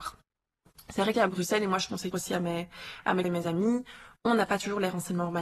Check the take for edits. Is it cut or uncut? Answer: cut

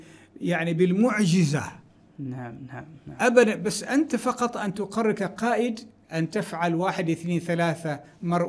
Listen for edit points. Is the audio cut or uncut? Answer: uncut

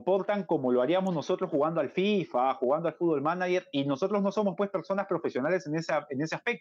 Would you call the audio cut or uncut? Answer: uncut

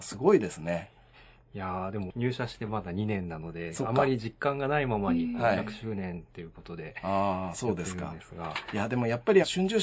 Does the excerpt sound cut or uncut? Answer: uncut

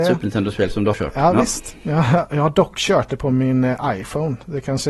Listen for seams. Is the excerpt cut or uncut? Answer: cut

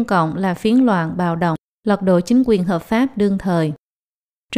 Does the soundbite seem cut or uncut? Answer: uncut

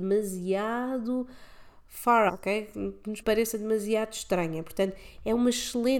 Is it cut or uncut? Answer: cut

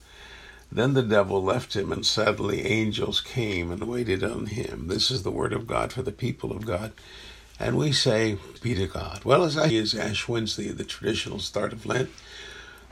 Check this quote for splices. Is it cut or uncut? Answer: cut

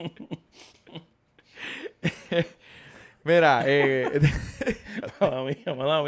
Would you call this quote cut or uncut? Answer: uncut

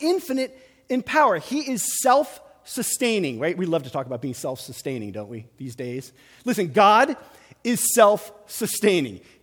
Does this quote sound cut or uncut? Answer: uncut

